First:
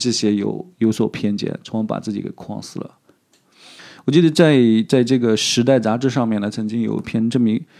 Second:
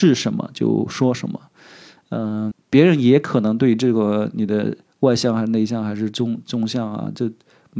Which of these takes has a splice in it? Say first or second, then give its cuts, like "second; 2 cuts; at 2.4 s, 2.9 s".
second; 2 cuts; at 2.5 s, 4.9 s